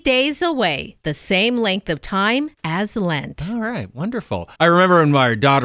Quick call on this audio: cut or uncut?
cut